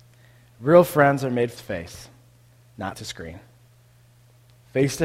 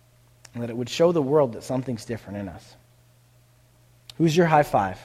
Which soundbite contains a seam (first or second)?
first